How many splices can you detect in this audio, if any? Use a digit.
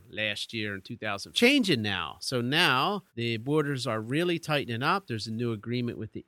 2